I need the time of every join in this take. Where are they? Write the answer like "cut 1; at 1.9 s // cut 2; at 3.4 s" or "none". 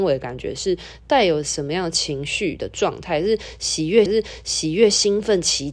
cut 1; at 4.1 s